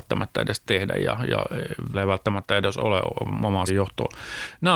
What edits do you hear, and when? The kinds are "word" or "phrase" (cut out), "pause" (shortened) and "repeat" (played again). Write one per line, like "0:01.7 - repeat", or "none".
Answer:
0:01.9 - word
0:03.7 - word